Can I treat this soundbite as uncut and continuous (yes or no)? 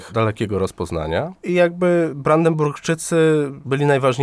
yes